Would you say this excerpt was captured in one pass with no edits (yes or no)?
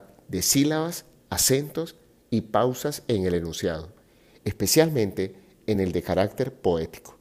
yes